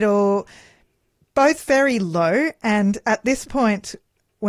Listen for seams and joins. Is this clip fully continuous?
yes; 0 cuts

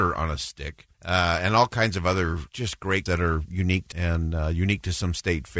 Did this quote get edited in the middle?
yes; 4 cuts; at 0.9 s, 2.5 s, 3.1 s, 3.9 s

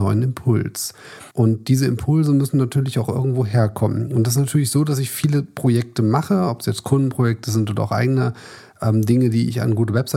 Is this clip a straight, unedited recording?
no; 1 cut; at 1.3 s

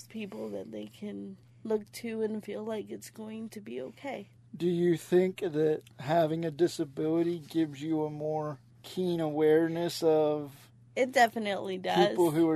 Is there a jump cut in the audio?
no; 0 cuts

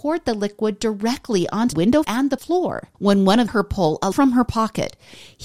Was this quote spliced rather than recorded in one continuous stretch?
yes; 6 cuts; at 1.7 s, 2.0 s, 2.4 s, 2.9 s, 3.5 s, 4.1 s

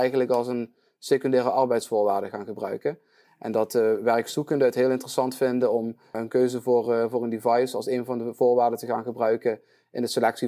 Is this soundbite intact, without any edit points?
yes; 0 cuts

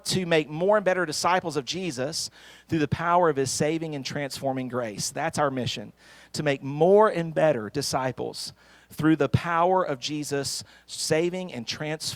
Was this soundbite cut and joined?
no; 0 cuts

